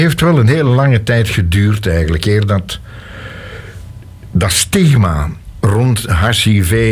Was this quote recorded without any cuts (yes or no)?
yes